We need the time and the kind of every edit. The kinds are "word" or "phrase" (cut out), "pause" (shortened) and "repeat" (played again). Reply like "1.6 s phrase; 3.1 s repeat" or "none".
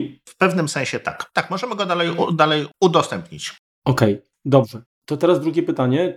4.9 s pause